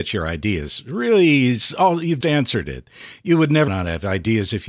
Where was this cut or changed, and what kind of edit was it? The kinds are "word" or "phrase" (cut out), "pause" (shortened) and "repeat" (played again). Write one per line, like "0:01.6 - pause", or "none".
0:02.2 - word
0:03.7 - word